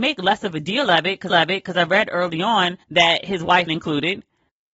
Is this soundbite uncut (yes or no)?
no